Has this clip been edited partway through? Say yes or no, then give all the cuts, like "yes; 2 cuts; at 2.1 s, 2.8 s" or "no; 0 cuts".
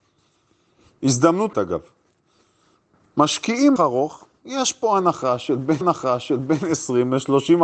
yes; 3 cuts; at 1.5 s, 3.8 s, 5.8 s